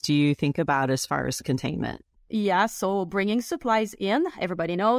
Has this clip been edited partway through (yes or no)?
no